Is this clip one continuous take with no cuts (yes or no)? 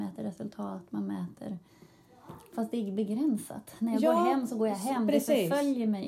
yes